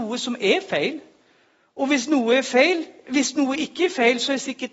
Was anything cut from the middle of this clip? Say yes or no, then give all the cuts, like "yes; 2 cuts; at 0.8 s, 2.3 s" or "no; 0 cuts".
no; 0 cuts